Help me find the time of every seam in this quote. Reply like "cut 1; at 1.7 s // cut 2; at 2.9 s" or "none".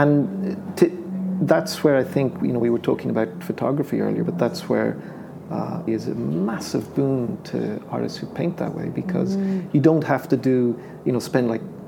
cut 1; at 5.9 s